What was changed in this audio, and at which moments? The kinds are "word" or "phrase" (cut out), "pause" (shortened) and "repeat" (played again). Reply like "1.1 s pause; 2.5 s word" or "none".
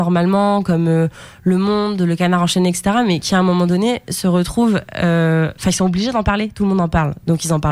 5.6 s pause